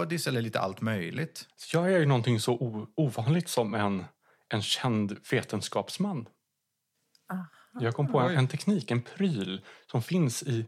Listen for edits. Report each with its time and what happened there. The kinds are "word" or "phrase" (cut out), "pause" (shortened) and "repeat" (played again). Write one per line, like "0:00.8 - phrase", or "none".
none